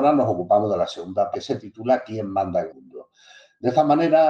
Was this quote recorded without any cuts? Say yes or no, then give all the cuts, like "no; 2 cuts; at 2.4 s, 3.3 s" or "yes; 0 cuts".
no; 2 cuts; at 1.3 s, 2.7 s